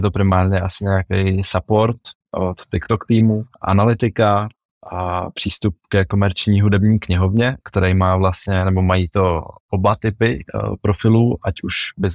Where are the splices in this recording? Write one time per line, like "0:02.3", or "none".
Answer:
0:03.5